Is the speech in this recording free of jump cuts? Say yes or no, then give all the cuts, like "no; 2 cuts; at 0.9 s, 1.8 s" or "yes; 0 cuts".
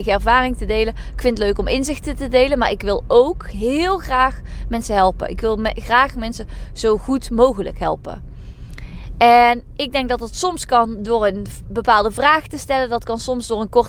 yes; 0 cuts